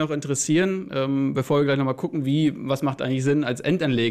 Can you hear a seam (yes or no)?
no